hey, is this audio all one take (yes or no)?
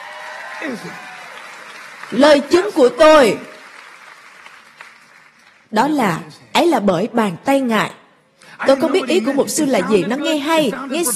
yes